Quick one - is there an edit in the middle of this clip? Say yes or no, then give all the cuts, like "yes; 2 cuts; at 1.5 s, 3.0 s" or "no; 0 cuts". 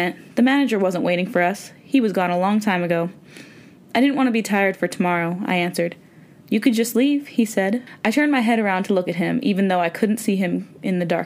no; 0 cuts